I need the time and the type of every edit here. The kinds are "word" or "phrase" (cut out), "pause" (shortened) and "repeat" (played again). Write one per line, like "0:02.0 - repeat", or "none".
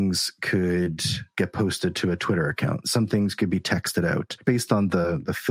0:04.4 - word